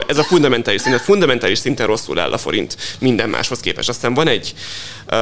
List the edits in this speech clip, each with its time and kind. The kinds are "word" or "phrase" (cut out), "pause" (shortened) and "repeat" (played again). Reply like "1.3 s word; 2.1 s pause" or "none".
none